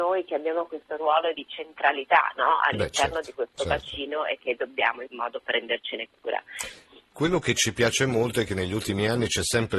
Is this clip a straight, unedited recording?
no; 2 cuts; at 1.3 s, 5.1 s

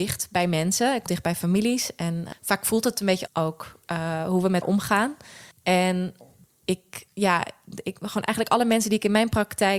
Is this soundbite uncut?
no; 6 cuts; at 1.1 s, 2.3 s, 3.3 s, 3.8 s, 4.6 s, 5.5 s

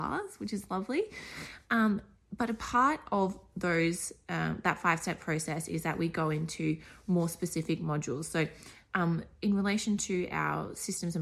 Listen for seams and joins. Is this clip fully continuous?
yes; 0 cuts

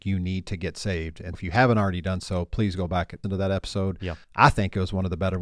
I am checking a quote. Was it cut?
yes; 3 cuts; at 1.3 s, 3.2 s, 4.2 s

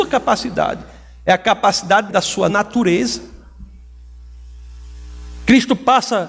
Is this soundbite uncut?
no; 2 cuts; at 2.1 s, 2.5 s

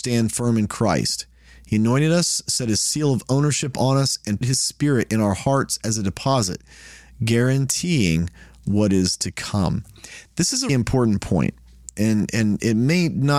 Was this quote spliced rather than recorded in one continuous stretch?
yes; 2 cuts; at 4.4 s, 10.7 s

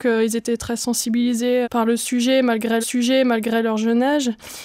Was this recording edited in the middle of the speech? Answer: yes; 2 cuts; at 1.6 s, 2.8 s

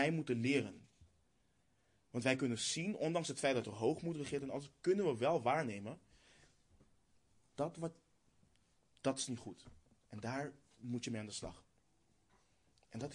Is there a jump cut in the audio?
no; 0 cuts

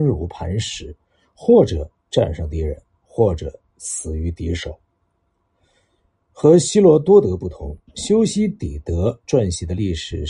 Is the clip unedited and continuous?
yes; 0 cuts

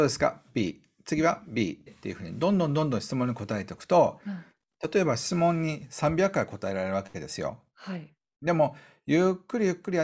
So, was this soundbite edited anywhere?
yes; 1 cut; at 1.9 s

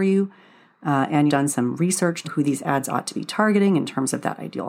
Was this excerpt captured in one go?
no; 2 cuts; at 1.3 s, 2.2 s

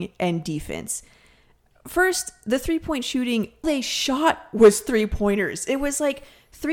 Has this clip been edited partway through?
yes; 1 cut; at 3.6 s

